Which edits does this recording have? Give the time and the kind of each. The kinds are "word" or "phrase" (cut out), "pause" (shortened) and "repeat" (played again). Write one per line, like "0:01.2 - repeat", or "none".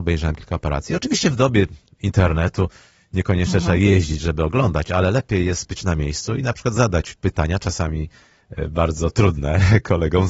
none